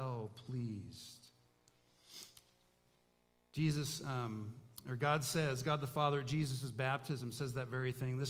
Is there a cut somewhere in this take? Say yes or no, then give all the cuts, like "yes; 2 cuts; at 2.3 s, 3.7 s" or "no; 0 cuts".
no; 0 cuts